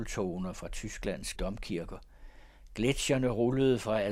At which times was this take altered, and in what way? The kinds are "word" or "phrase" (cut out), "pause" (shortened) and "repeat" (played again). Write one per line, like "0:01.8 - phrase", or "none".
0:01.3 - word